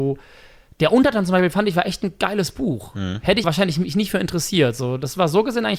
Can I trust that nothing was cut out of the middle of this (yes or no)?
no